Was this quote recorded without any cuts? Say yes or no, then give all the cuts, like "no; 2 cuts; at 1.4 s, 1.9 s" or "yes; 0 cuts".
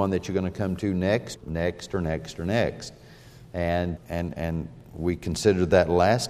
no; 2 cuts; at 1.4 s, 4.0 s